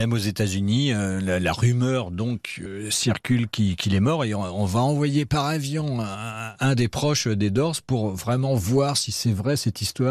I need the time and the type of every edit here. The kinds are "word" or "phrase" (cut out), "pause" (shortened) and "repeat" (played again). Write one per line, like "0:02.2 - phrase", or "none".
none

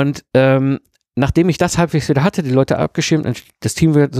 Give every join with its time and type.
none

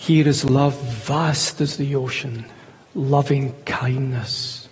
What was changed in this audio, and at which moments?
none

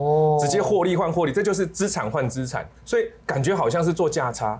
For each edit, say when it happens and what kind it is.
0:02.8 - pause
0:03.2 - pause

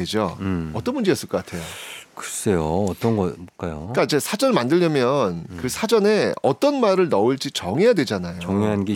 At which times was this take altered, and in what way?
none

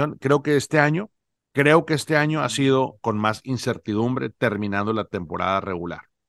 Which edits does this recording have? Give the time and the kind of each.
0:01.4 - pause
0:03.0 - phrase

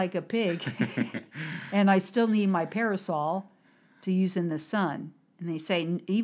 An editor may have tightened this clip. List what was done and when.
none

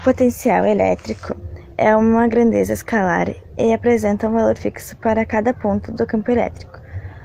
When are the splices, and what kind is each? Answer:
none

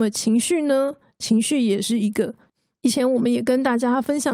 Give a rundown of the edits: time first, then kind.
0:02.5 - pause

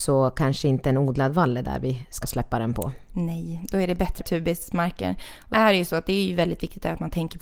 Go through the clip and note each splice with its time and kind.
0:02.2 - word
0:04.2 - word
0:05.5 - word

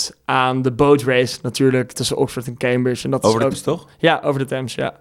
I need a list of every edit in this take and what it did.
0:01.9 - word
0:03.5 - word

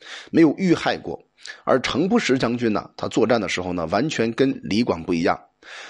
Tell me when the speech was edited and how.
none

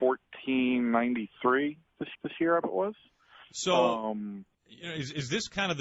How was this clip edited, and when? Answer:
0:02.1 - repeat
0:02.6 - word
0:03.5 - pause
0:04.5 - pause

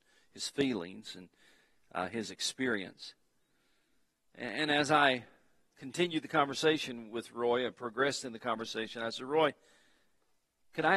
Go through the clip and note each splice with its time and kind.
none

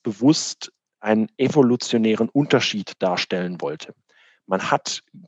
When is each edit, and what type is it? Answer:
none

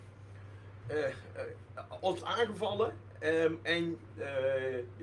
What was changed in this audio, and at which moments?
0:02.2 - phrase

